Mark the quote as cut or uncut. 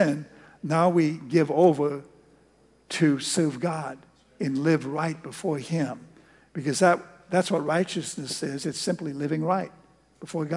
uncut